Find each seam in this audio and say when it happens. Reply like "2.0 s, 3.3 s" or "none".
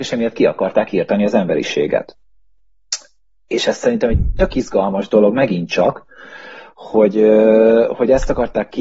none